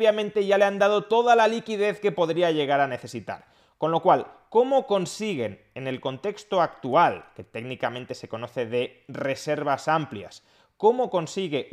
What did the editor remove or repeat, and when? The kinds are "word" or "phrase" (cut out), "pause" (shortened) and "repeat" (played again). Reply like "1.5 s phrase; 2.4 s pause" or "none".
none